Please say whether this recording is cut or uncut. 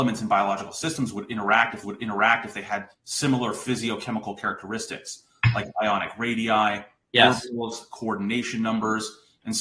cut